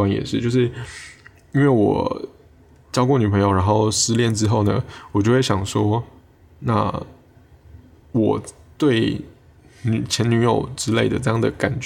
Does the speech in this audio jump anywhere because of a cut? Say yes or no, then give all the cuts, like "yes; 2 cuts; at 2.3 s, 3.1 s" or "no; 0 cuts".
no; 0 cuts